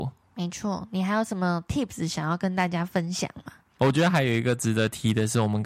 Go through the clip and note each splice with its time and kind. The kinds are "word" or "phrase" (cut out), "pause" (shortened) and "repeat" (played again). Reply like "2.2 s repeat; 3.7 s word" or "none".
none